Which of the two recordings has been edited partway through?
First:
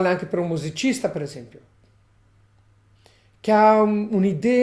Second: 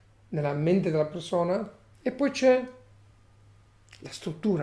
second; 1 cut; at 1.9 s

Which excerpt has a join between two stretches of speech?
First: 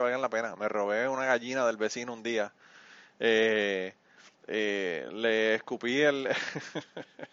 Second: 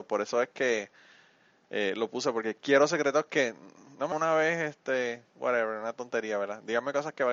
second; 1 cut; at 4.1 s

